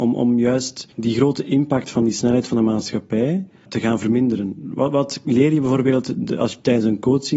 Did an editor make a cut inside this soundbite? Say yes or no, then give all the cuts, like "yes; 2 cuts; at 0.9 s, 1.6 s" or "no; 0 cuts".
yes; 1 cut; at 0.9 s